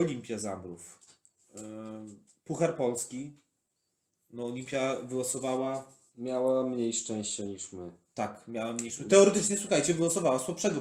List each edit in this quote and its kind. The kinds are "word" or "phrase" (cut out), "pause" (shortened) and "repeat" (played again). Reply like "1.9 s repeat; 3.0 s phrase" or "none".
8.9 s word

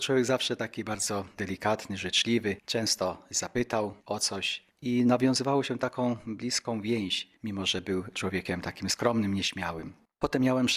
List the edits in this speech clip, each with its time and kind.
none

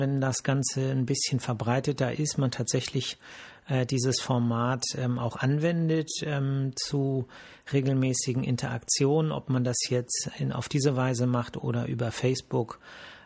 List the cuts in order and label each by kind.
none

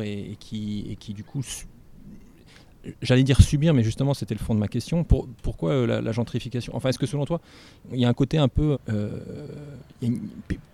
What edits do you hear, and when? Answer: 8.7 s word

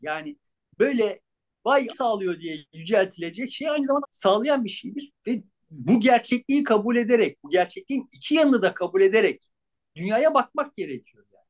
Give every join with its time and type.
1.9 s word; 2.6 s pause; 4.0 s phrase; 5.6 s word

